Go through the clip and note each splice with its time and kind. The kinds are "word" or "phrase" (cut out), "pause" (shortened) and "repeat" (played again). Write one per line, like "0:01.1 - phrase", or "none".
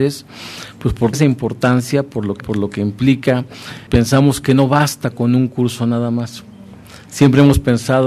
0:01.1 - word
0:02.4 - word
0:03.9 - word